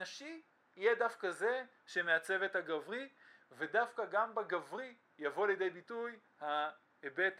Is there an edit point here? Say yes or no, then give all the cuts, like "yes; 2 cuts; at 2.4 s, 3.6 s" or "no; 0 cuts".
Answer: no; 0 cuts